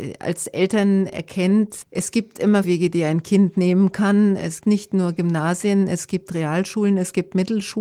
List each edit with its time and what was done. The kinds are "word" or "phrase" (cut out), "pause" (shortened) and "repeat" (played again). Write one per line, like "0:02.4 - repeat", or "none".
0:01.8 - word
0:02.6 - word
0:04.6 - word